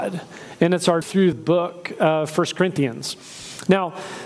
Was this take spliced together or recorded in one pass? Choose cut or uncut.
cut